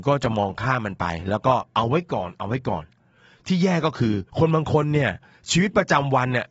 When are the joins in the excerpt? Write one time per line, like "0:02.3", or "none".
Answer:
0:04.3